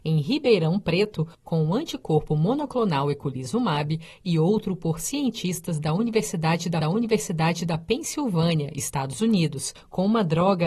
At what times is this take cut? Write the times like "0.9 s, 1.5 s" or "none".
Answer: 6.8 s